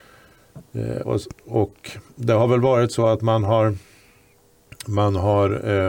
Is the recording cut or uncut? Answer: cut